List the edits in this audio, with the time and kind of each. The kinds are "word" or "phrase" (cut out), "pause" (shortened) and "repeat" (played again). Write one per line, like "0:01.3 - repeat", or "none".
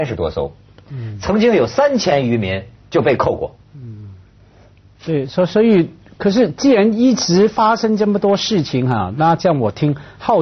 0:03.7 - pause